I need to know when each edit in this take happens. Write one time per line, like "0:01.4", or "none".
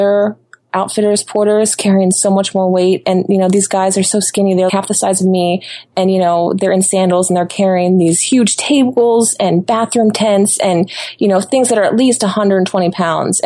0:04.7